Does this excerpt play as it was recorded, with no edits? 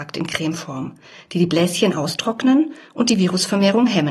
yes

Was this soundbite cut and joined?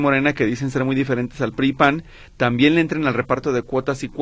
no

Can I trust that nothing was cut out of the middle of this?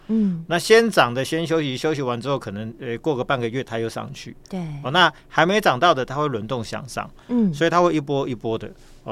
yes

